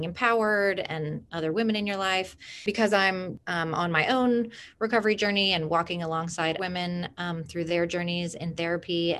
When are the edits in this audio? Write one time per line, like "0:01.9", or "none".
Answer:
0:06.6